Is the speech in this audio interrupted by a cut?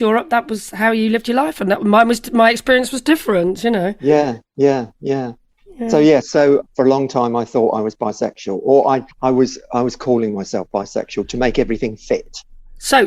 yes; 3 cuts; at 6.2 s, 6.6 s, 9.1 s

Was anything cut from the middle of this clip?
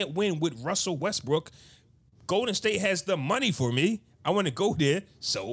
no; 0 cuts

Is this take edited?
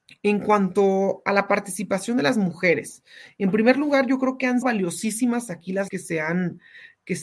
yes; 2 cuts; at 4.6 s, 5.9 s

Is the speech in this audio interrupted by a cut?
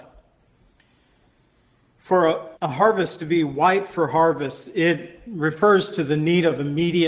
yes; 1 cut; at 2.6 s

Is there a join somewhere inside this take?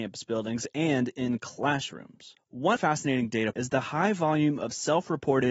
yes; 2 cuts; at 2.8 s, 3.5 s

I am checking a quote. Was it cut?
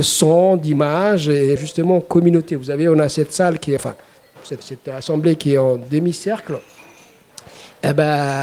yes; 3 cuts; at 1.6 s, 3.8 s, 4.6 s

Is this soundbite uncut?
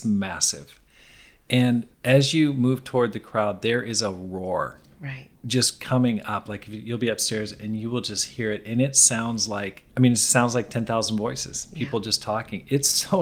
no; 3 cuts; at 1.9 s, 5.3 s, 9.9 s

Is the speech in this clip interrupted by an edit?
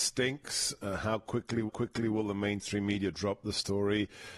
yes; 1 cut; at 1.7 s

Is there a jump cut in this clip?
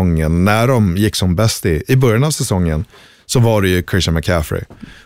no; 0 cuts

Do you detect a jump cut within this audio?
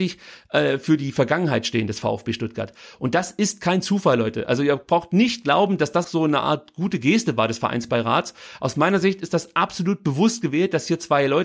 yes; 1 cut; at 6.0 s

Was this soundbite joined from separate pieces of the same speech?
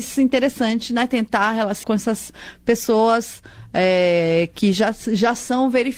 yes; 1 cut; at 1.8 s

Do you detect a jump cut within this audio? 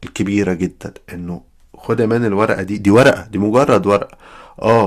no; 0 cuts

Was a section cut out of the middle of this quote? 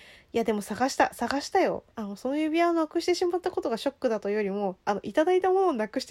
yes; 1 cut; at 1.9 s

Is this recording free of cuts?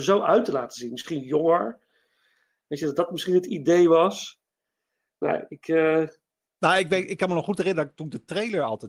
yes; 0 cuts

